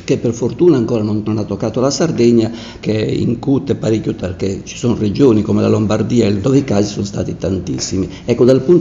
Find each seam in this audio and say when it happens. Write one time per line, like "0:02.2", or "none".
0:01.2
0:02.8
0:04.2
0:06.4